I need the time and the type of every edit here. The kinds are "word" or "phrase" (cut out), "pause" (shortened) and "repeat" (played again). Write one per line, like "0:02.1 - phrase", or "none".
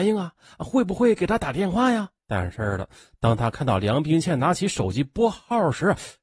0:02.2 - pause